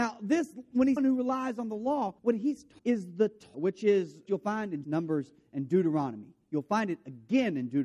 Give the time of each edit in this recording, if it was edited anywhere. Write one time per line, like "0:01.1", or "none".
0:01.0
0:02.2
0:02.8
0:03.5
0:04.3
0:04.8